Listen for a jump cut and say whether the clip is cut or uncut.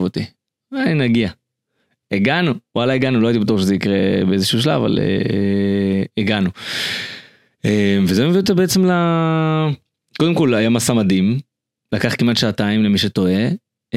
uncut